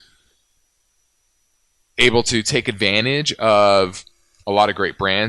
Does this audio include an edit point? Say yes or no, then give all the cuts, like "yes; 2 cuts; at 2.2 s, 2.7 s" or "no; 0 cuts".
no; 0 cuts